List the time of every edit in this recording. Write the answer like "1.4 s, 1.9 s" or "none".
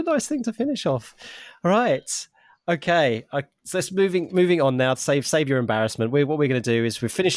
none